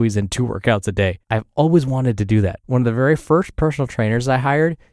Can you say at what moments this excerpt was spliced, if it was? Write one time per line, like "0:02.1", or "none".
0:01.2
0:02.6

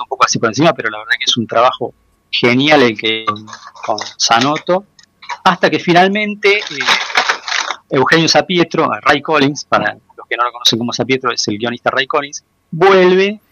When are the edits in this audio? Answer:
0:02.1

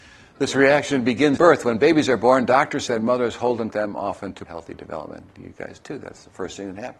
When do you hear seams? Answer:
0:01.4
0:02.9
0:03.7
0:04.5
0:05.8

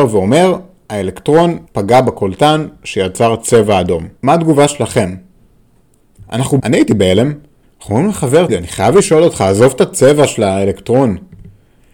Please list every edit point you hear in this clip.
0:01.7
0:04.2
0:06.6
0:07.6
0:08.5

